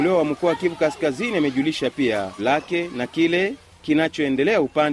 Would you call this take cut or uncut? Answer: cut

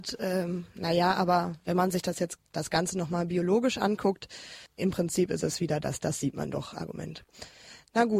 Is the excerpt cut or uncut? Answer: cut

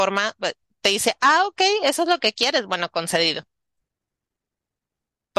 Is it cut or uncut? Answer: uncut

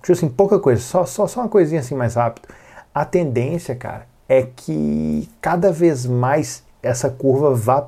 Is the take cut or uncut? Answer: uncut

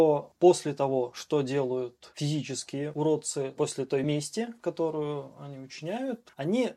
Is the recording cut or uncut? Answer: uncut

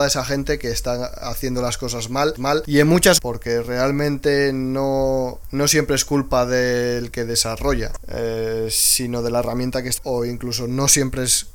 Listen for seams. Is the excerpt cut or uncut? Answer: cut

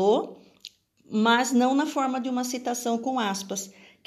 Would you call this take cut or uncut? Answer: uncut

